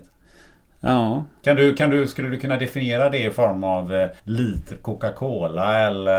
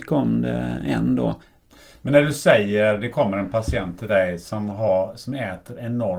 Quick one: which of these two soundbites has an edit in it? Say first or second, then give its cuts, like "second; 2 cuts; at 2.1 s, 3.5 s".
first; 1 cut; at 4.2 s